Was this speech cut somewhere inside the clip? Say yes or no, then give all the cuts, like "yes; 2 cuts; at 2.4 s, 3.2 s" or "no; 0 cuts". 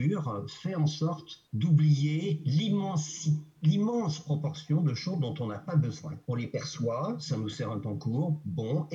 yes; 2 cuts; at 1.5 s, 6.2 s